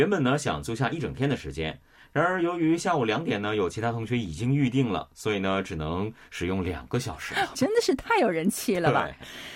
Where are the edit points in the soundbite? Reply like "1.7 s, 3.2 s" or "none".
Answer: 7.5 s